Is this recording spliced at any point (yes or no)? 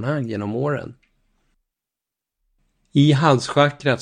no